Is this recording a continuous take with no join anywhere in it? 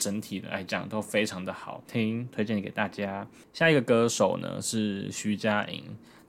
yes; 0 cuts

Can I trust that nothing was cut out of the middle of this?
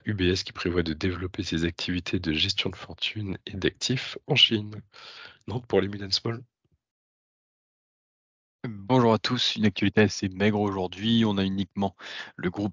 yes; 0 cuts

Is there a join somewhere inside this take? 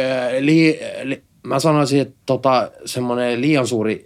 no; 0 cuts

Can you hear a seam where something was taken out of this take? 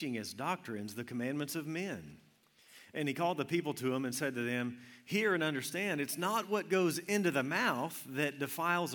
no; 0 cuts

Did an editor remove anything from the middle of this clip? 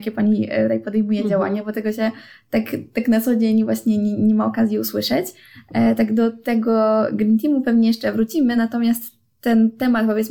no; 0 cuts

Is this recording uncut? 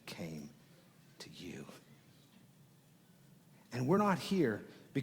yes; 0 cuts

